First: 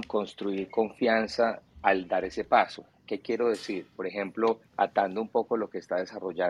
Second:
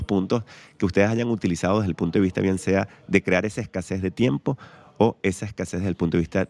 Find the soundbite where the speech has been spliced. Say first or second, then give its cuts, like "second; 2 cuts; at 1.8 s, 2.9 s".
first; 1 cut; at 4.7 s